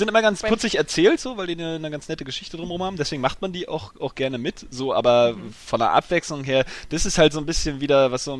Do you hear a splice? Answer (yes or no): no